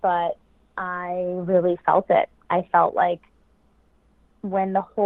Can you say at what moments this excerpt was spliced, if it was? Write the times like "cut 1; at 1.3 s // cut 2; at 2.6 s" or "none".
none